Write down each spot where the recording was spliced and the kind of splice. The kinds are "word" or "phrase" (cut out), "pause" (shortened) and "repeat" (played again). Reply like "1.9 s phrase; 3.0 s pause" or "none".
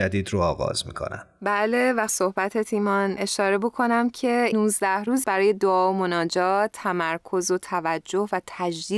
2.1 s phrase; 4.5 s word; 5.2 s phrase